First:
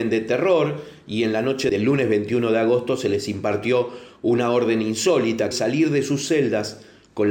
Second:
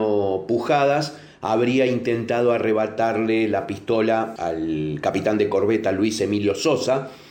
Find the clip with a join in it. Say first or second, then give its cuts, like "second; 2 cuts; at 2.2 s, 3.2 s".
first; 1 cut; at 5.5 s